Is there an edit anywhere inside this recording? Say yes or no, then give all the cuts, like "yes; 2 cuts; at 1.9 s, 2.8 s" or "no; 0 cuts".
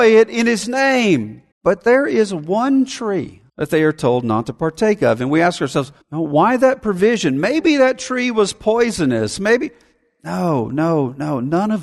yes; 3 cuts; at 1.5 s, 3.5 s, 6.0 s